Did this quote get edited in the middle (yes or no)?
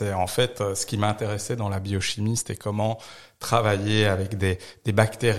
no